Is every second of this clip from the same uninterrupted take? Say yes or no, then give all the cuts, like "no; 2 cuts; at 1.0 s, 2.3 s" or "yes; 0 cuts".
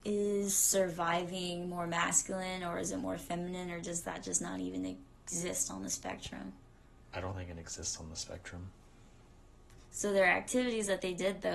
yes; 0 cuts